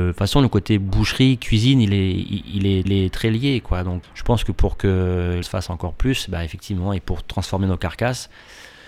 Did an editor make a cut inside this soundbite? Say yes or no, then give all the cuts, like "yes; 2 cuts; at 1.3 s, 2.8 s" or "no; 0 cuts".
yes; 3 cuts; at 2.9 s, 4.0 s, 5.4 s